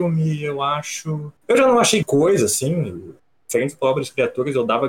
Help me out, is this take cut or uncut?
cut